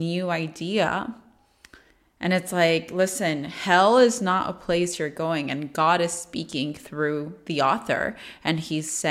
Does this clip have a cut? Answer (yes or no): no